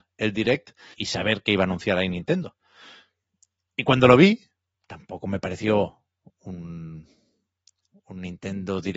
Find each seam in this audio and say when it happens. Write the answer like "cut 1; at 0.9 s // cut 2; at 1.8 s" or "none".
cut 1; at 0.9 s // cut 2; at 4.7 s